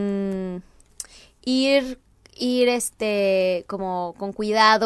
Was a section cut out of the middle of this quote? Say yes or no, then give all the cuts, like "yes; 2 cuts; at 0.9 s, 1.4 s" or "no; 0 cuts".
no; 0 cuts